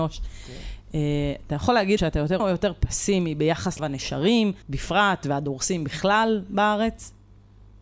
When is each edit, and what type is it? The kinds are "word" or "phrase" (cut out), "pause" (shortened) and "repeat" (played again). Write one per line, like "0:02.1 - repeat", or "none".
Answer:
0:02.0 - word
0:02.4 - word
0:03.8 - word
0:04.6 - pause